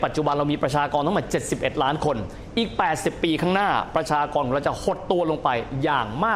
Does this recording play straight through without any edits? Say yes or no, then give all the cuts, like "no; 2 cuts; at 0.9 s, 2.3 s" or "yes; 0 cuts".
yes; 0 cuts